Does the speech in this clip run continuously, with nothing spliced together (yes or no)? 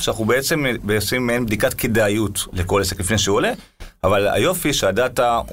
yes